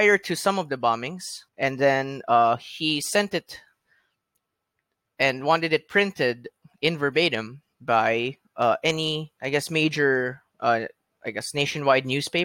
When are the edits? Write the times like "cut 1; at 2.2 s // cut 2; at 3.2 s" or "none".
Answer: cut 1; at 1.5 s